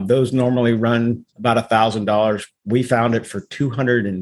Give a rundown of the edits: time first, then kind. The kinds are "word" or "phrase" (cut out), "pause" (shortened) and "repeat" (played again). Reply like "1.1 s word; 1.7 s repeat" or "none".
1.3 s pause